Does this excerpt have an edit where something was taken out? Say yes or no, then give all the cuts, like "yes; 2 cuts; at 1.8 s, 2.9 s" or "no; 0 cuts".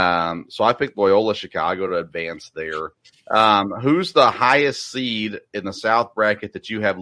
no; 0 cuts